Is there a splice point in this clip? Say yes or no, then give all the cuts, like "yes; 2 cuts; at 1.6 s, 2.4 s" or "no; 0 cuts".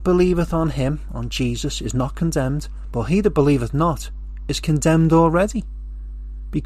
no; 0 cuts